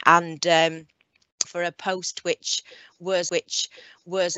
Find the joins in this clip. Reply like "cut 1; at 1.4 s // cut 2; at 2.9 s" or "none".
cut 1; at 1.4 s // cut 2; at 3.3 s